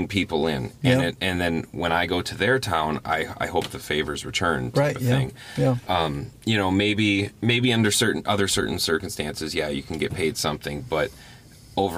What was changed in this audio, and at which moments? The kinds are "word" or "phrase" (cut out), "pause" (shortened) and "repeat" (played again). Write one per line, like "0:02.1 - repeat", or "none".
0:06.4 - pause
0:07.3 - pause